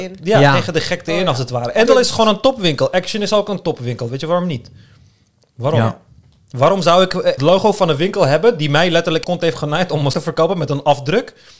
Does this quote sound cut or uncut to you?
cut